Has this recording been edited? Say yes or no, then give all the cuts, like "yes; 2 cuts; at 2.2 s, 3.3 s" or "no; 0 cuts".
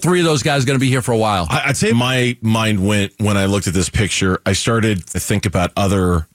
yes; 2 cuts; at 1.9 s, 5.1 s